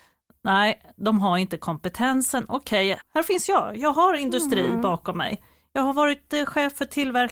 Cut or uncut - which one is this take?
cut